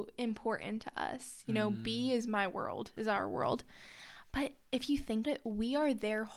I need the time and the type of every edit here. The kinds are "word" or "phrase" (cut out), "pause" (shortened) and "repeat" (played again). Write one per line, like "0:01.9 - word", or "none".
0:05.2 - word